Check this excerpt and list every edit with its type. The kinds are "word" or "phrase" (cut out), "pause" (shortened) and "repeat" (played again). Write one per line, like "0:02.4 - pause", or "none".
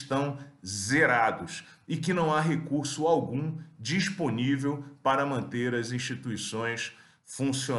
none